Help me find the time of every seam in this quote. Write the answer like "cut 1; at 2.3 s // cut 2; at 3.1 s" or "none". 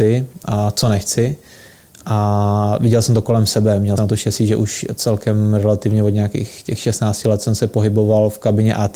cut 1; at 4.0 s

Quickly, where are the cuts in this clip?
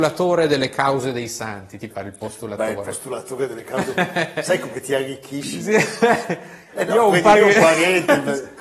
cut 1; at 1.9 s // cut 2; at 6.7 s // cut 3; at 7.3 s

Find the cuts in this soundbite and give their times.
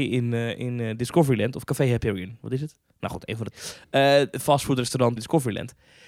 cut 1; at 3.5 s // cut 2; at 5.2 s

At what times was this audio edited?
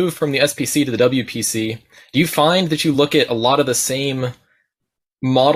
none

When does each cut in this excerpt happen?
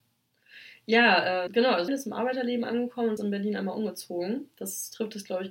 cut 1; at 1.5 s // cut 2; at 1.9 s // cut 3; at 3.2 s

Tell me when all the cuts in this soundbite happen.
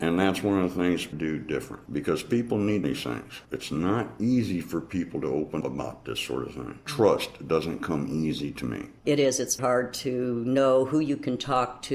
cut 1; at 1.1 s // cut 2; at 2.8 s // cut 3; at 3.4 s // cut 4; at 5.6 s // cut 5; at 9.0 s // cut 6; at 9.6 s

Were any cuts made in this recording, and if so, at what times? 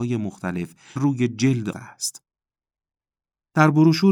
cut 1; at 1.0 s // cut 2; at 1.7 s

